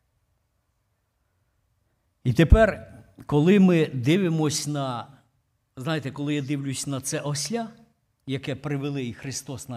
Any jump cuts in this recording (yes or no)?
no